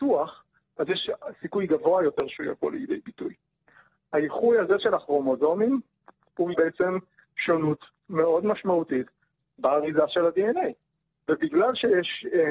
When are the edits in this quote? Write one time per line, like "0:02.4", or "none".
0:06.5